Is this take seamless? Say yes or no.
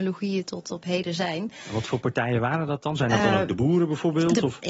yes